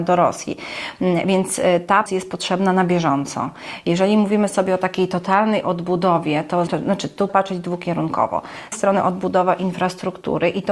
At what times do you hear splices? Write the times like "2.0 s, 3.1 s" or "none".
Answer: 2.1 s, 6.7 s, 7.3 s, 8.7 s